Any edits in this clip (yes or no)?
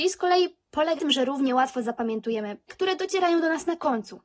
yes